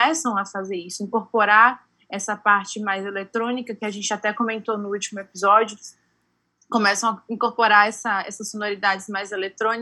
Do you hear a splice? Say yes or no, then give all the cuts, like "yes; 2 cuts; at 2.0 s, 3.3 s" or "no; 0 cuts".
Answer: no; 0 cuts